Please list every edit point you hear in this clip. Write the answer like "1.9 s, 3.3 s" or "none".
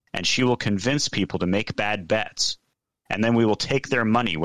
none